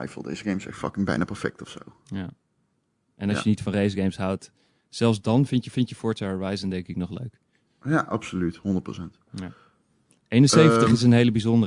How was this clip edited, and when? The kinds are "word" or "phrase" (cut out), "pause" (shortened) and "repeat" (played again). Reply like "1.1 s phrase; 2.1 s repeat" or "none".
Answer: 5.7 s repeat

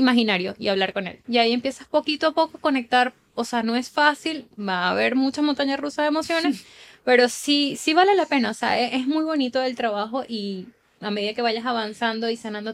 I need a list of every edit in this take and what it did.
none

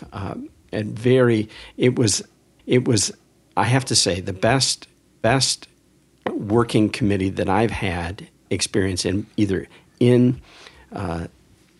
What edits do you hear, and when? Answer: 2.6 s repeat; 5.2 s repeat; 8.5 s word

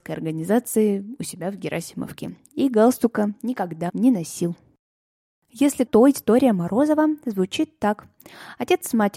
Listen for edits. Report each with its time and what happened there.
3.9 s word; 5.9 s word

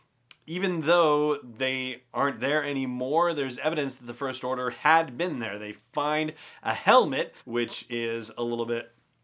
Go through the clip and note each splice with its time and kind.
7.4 s pause

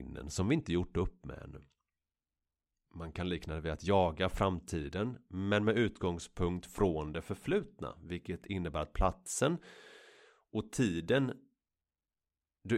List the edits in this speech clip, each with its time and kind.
none

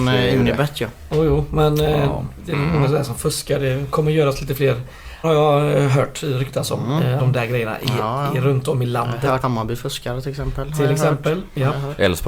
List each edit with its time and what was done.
5.2 s word; 7.2 s word; 9.4 s word

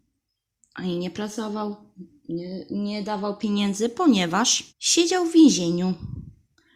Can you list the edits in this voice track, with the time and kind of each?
4.7 s pause

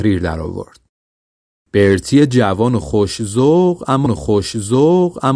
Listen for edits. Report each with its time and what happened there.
4.1 s repeat

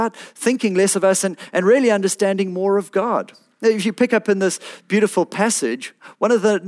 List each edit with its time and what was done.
none

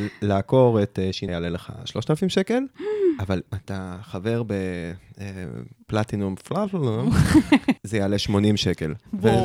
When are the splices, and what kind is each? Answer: 1.3 s word; 3.5 s word; 7.8 s word

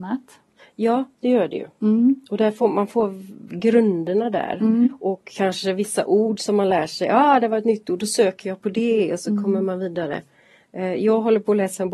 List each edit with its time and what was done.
none

